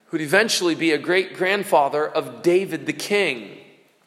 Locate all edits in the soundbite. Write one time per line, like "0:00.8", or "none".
none